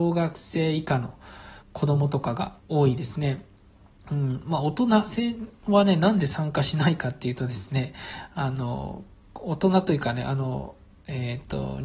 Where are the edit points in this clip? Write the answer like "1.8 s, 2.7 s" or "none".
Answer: 1.6 s, 2.6 s